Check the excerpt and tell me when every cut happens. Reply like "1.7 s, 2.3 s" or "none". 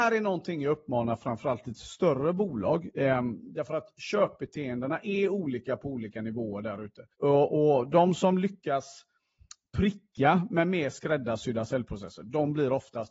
7.1 s